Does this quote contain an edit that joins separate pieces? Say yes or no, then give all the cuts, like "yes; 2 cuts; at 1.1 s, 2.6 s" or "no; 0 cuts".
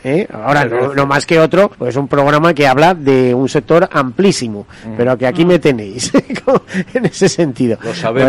yes; 1 cut; at 1.7 s